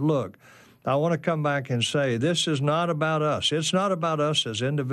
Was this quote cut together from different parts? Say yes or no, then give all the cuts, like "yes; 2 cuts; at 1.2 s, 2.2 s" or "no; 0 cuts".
no; 0 cuts